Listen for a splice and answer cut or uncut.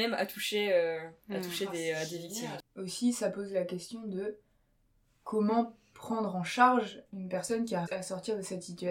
cut